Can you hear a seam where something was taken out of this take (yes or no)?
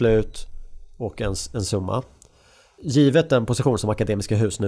no